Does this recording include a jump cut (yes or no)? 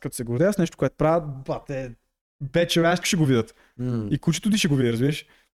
yes